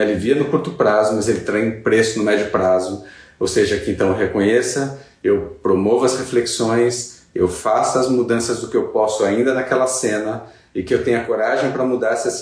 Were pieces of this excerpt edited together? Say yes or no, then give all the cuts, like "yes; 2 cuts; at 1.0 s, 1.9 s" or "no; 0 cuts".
no; 0 cuts